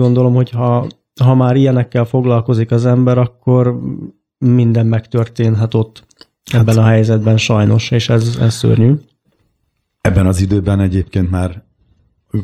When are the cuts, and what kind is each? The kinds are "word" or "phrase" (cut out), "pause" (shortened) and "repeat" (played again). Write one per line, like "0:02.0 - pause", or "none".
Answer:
none